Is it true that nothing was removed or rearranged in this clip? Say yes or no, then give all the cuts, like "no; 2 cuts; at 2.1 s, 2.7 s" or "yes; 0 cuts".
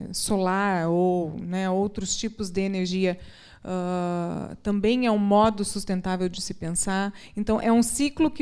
yes; 0 cuts